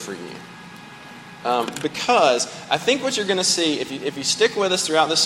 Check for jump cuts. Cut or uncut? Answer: uncut